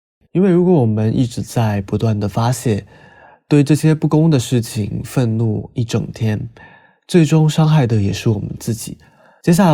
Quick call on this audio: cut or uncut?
uncut